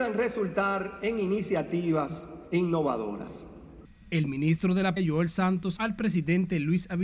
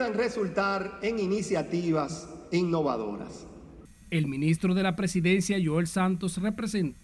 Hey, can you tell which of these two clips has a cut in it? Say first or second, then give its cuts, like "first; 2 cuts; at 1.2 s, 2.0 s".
first; 2 cuts; at 5.0 s, 5.8 s